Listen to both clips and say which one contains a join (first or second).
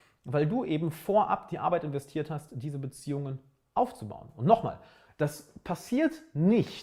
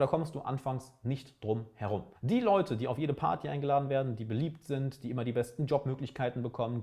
second